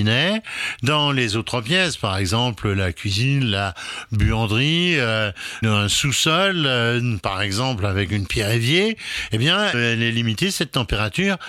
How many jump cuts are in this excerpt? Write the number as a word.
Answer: two